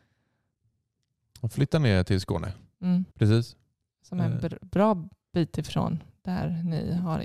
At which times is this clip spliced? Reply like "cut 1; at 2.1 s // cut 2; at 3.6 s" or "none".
cut 1; at 3.1 s